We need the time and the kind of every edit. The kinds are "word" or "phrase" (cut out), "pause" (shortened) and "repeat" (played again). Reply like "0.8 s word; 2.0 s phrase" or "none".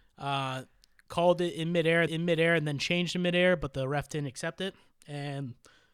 2.1 s repeat